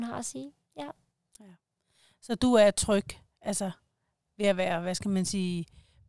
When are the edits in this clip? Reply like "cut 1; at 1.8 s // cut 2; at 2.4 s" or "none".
none